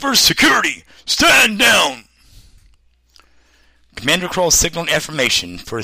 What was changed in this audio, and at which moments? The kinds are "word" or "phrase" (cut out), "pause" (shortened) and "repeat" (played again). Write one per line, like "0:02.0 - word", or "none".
none